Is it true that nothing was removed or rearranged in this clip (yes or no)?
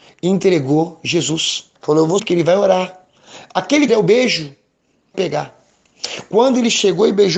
no